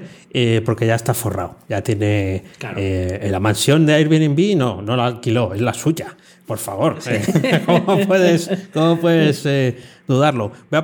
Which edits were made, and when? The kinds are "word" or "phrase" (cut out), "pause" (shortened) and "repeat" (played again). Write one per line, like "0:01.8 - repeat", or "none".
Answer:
none